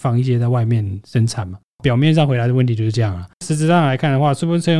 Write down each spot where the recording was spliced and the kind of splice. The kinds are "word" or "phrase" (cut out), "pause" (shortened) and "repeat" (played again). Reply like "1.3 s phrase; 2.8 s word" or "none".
3.3 s pause